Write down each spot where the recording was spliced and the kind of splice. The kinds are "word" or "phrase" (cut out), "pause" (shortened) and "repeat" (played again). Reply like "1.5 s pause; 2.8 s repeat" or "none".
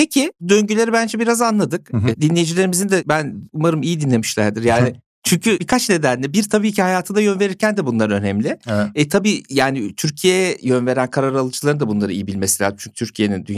none